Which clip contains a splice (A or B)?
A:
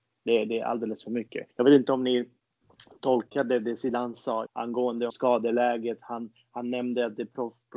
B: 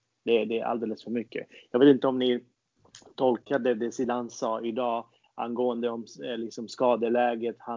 A